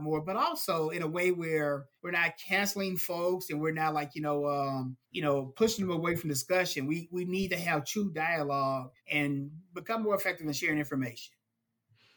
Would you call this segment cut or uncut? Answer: cut